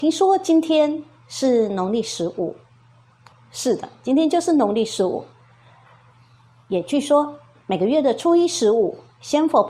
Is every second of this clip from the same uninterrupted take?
no; 1 cut; at 3.3 s

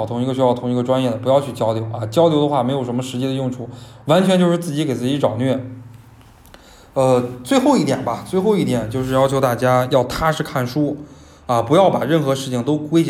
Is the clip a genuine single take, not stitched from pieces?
yes; 0 cuts

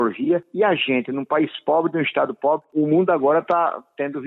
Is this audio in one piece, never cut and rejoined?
yes; 0 cuts

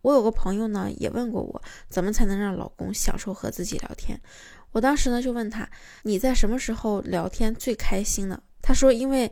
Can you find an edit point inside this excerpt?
yes; 1 cut; at 6.0 s

